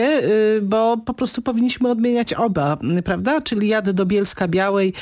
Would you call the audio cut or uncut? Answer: uncut